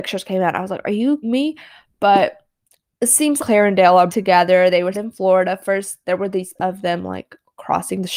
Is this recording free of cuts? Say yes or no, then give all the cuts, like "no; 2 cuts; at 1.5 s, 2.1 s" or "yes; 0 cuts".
no; 6 cuts; at 1.2 s, 3.4 s, 4.1 s, 4.9 s, 6.0 s, 6.6 s